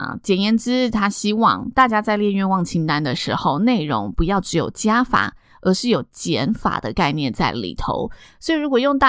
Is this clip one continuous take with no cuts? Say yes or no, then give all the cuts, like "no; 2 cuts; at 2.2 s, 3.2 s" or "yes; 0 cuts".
yes; 0 cuts